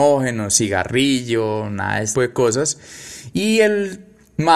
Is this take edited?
yes; 1 cut; at 2.1 s

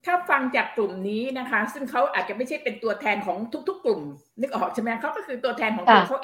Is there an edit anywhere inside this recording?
no; 0 cuts

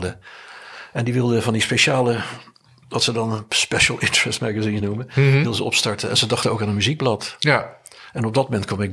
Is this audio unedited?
yes; 0 cuts

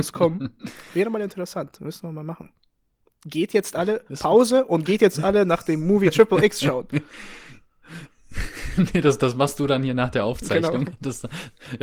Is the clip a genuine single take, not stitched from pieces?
yes; 0 cuts

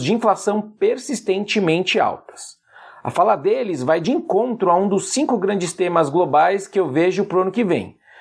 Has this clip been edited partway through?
no; 0 cuts

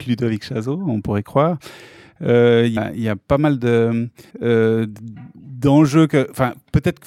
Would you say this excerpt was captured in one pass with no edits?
no; 2 cuts; at 2.8 s, 4.3 s

